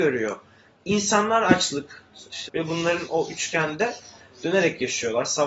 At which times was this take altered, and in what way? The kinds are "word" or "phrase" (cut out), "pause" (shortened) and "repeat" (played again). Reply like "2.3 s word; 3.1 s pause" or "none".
2.5 s phrase